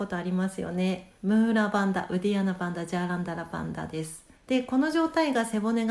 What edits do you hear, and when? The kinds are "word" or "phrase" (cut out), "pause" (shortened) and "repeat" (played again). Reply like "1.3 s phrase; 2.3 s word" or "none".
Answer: 1.2 s pause; 4.3 s pause